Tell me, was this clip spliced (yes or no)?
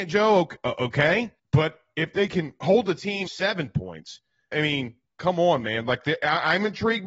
yes